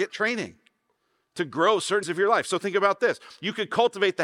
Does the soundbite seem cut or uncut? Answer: cut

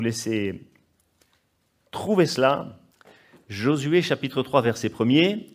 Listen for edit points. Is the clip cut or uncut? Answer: uncut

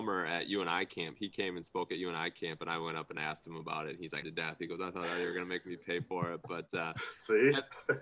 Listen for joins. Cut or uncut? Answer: cut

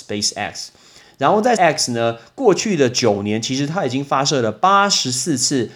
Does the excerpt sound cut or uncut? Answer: cut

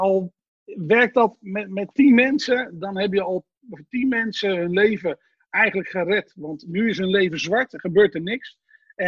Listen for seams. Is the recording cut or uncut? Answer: uncut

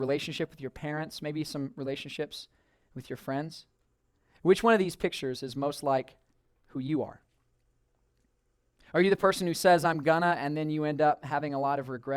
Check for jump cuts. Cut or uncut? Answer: uncut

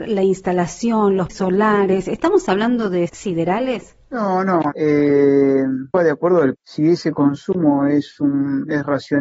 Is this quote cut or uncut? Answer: cut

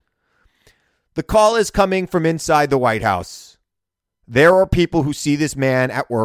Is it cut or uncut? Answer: uncut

